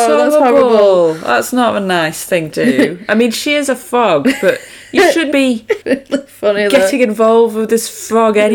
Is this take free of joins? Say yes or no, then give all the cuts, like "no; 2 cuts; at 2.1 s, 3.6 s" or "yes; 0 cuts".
no; 3 cuts; at 2.5 s, 5.3 s, 5.8 s